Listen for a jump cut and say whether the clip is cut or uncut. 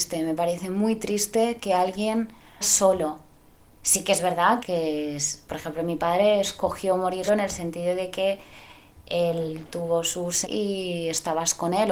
cut